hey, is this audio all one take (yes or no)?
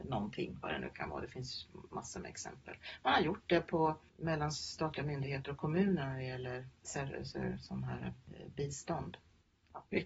yes